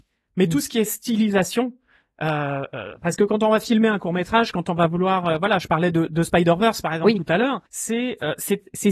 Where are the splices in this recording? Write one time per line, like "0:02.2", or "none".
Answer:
0:07.7